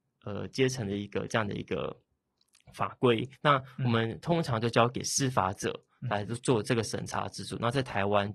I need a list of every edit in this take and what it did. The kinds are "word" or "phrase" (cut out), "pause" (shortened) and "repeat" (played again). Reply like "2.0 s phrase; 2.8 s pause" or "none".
3.3 s pause